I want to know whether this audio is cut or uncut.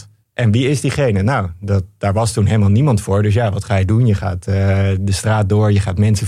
uncut